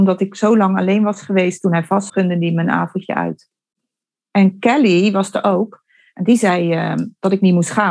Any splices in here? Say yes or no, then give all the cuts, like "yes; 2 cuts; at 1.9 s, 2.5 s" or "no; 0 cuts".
yes; 1 cut; at 2.1 s